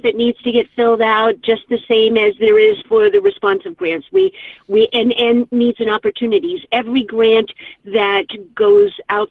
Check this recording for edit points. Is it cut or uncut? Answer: uncut